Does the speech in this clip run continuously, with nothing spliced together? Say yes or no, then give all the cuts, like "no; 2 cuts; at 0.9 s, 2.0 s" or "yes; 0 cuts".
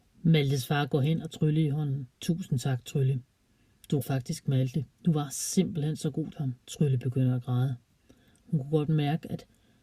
no; 6 cuts; at 1.3 s, 2.1 s, 4.0 s, 4.9 s, 6.3 s, 6.6 s